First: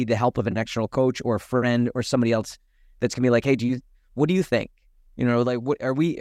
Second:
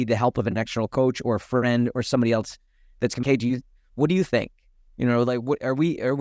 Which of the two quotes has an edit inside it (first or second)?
second